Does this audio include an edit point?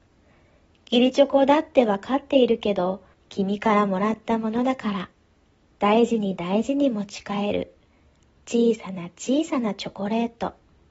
yes; 1 cut; at 3.1 s

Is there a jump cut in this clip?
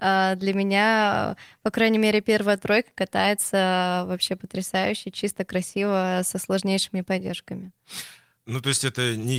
yes; 1 cut; at 8.3 s

